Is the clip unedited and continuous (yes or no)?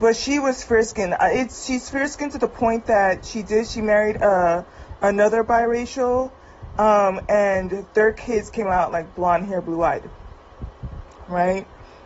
yes